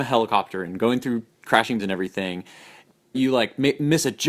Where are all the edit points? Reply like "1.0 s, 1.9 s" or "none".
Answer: 1.8 s, 3.1 s

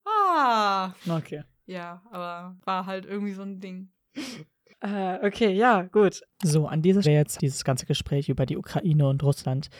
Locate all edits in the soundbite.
1.0 s, 6.3 s, 7.0 s, 7.4 s

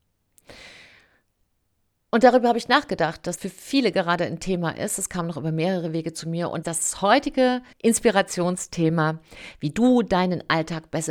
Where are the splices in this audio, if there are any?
3.4 s, 6.6 s, 7.7 s

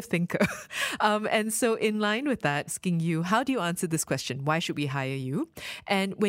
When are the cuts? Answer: 2.7 s

